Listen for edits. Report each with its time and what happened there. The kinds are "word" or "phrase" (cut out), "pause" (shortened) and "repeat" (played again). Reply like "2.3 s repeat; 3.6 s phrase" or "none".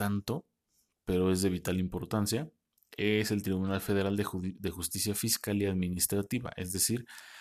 none